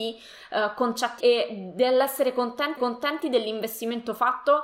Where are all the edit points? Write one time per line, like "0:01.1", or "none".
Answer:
0:01.2
0:02.8